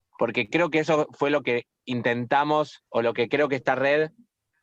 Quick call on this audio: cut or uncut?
cut